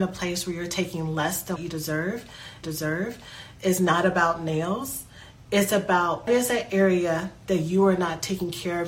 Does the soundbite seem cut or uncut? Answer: cut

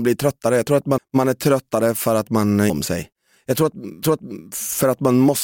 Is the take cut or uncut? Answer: cut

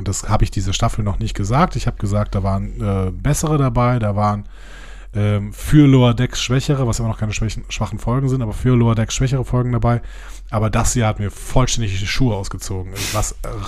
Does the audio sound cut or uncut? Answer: uncut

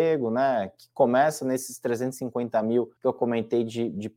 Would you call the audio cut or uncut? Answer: cut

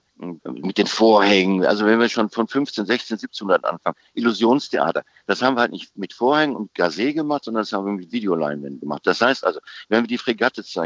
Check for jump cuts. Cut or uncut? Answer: uncut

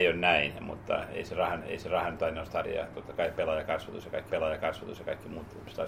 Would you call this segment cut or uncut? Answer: cut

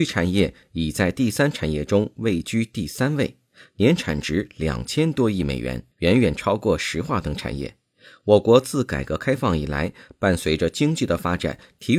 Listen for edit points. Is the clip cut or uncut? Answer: cut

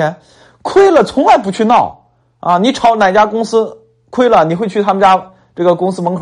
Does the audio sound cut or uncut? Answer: cut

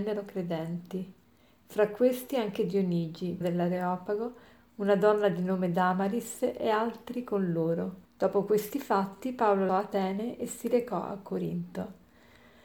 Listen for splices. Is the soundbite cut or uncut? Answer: cut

